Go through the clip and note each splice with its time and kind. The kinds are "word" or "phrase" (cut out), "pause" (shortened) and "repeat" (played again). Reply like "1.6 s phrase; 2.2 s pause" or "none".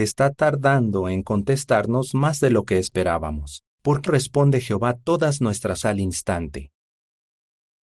3.7 s pause; 4.1 s word; 5.8 s word